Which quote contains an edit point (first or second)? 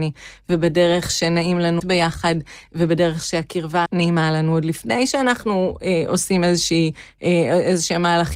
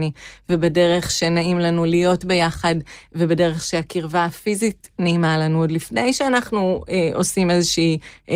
first